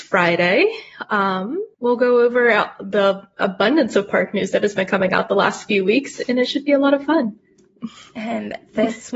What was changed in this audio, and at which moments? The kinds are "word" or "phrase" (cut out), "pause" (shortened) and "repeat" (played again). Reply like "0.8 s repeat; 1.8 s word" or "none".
1.7 s pause